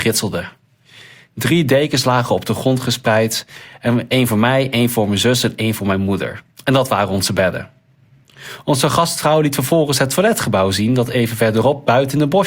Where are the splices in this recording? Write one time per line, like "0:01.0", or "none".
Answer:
0:06.5